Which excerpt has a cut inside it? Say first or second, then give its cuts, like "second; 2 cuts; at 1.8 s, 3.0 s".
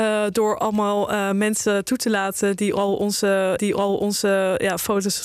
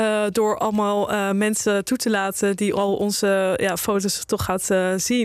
first; 1 cut; at 3.6 s